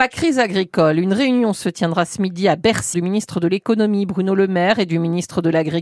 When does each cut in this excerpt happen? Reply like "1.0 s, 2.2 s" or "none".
2.9 s